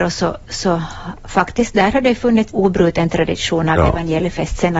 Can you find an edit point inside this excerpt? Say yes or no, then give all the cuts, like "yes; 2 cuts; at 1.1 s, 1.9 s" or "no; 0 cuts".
yes; 1 cut; at 2.5 s